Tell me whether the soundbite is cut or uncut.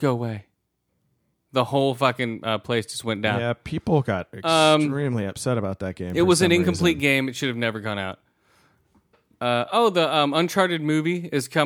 uncut